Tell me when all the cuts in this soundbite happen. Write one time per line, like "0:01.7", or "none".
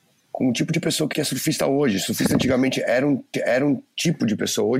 0:01.1
0:03.3